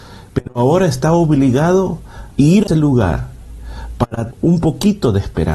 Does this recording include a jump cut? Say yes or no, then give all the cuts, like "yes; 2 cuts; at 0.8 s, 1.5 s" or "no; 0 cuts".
yes; 3 cuts; at 2.3 s, 2.7 s, 4.3 s